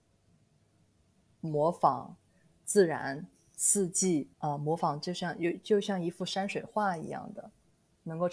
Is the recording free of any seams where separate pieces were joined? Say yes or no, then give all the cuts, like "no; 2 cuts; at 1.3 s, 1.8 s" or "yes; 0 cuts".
no; 1 cut; at 4.3 s